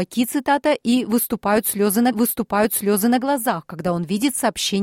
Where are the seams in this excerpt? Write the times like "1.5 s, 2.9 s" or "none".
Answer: 2.1 s